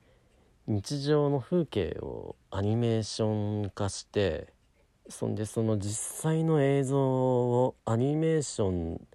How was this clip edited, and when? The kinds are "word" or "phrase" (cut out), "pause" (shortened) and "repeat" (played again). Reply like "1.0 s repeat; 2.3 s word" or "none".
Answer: 2.4 s pause; 4.7 s pause; 7.8 s pause